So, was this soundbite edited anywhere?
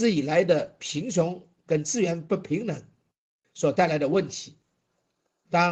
no; 0 cuts

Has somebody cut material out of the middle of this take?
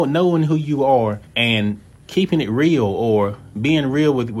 yes; 1 cut; at 1.2 s

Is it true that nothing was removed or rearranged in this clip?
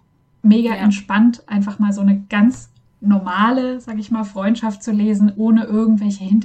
yes; 0 cuts

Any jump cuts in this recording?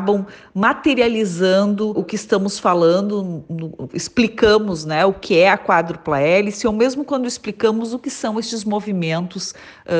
yes; 2 cuts; at 1.9 s, 3.9 s

